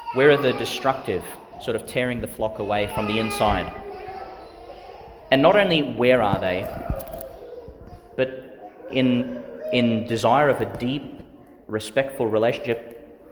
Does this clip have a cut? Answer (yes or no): no